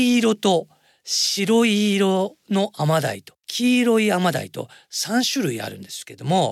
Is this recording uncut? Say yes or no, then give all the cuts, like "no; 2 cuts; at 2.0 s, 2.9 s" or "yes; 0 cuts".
no; 1 cut; at 3.4 s